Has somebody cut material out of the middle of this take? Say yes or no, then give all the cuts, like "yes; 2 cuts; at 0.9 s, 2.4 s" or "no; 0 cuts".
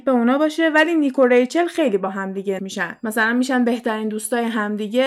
yes; 1 cut; at 2.6 s